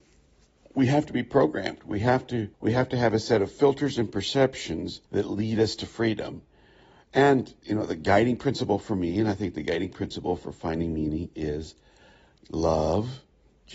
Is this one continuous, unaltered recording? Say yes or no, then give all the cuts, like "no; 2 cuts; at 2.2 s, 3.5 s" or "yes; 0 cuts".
no; 3 cuts; at 2.5 s, 5.1 s, 7.6 s